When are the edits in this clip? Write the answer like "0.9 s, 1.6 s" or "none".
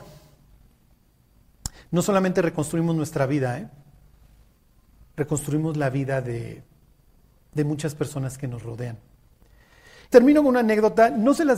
10.1 s